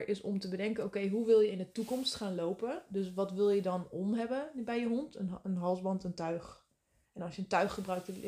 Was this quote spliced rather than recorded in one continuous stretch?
no; 0 cuts

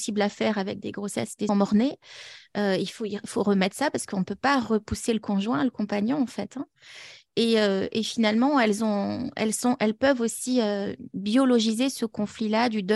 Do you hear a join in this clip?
yes; 1 cut; at 1.5 s

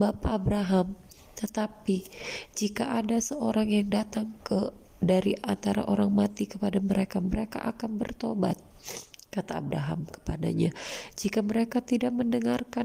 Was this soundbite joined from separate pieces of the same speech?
no; 0 cuts

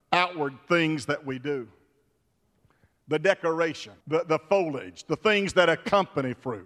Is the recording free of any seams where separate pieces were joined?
no; 1 cut; at 4.0 s

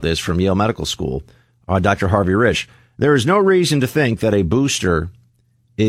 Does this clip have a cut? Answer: no; 0 cuts

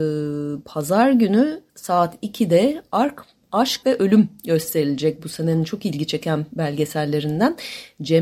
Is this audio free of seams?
no; 2 cuts; at 1.7 s, 3.8 s

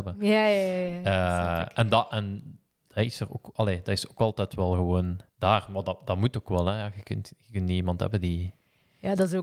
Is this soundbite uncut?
no; 1 cut; at 5.3 s

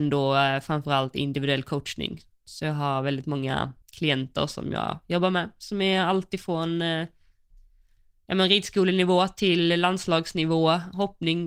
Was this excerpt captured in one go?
no; 1 cut; at 3.8 s

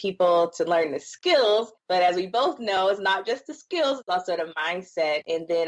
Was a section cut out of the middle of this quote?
no; 0 cuts

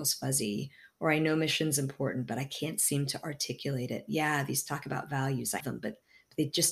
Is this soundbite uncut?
no; 1 cut; at 5.6 s

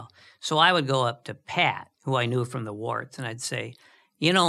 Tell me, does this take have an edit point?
yes; 1 cut; at 1.9 s

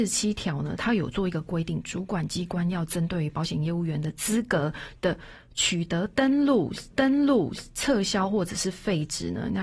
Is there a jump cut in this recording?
yes; 1 cut; at 6.9 s

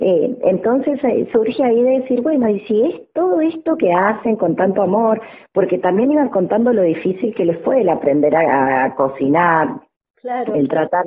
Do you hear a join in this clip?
no; 0 cuts

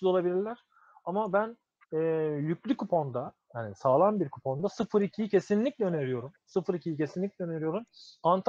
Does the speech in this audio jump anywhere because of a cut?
no; 0 cuts

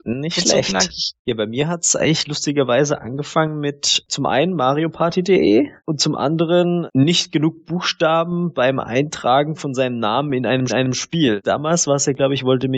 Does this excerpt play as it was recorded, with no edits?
no; 3 cuts; at 1.2 s, 5.8 s, 10.7 s

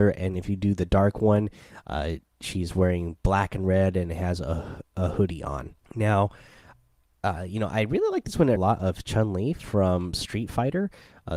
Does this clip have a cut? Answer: yes; 2 cuts; at 5.8 s, 8.6 s

